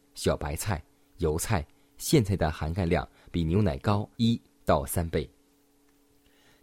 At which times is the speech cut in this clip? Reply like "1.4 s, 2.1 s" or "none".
4.1 s